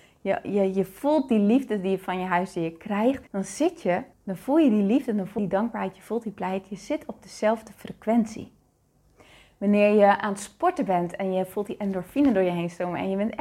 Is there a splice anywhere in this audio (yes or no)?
yes